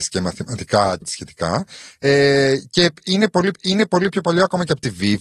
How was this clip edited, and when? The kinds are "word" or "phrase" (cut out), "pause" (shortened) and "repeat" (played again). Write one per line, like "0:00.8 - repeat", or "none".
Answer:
0:01.0 - word
0:03.5 - repeat